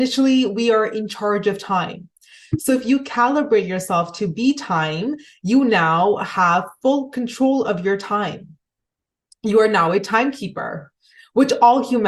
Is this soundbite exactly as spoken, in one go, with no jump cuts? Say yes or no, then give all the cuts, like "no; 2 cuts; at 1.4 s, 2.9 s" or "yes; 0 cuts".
yes; 0 cuts